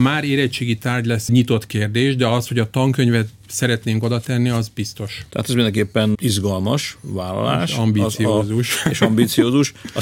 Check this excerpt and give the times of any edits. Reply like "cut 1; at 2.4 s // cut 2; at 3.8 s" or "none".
cut 1; at 1.3 s